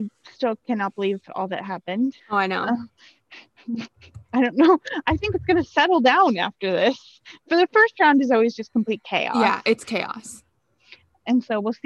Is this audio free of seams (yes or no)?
no